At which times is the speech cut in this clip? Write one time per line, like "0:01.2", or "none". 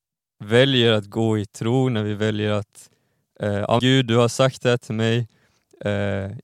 0:03.8